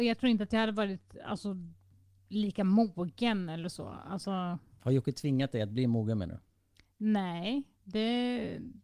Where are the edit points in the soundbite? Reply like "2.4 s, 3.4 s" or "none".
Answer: none